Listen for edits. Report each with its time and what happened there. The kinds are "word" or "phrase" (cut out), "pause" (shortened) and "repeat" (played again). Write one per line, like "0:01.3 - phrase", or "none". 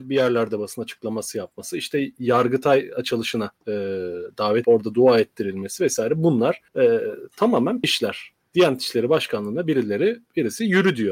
0:03.6 - pause
0:04.6 - word
0:06.7 - pause
0:07.8 - word